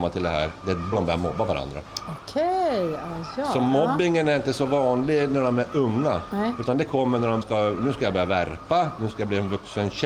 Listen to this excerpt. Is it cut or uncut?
cut